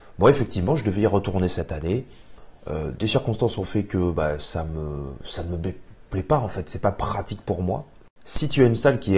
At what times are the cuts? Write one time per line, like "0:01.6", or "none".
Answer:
none